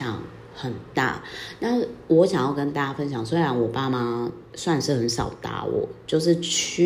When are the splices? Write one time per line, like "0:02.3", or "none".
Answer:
0:04.4